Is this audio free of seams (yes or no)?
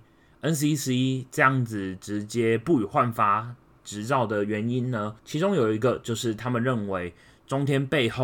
no